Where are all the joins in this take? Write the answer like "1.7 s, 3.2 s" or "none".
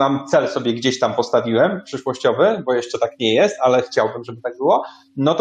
none